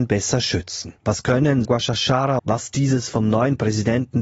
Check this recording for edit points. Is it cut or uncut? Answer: cut